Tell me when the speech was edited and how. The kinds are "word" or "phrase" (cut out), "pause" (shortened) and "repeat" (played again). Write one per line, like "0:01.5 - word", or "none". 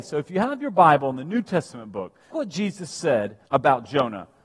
0:02.3 - word
0:03.5 - pause